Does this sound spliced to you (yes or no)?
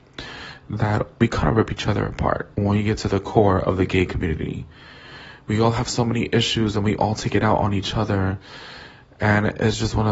yes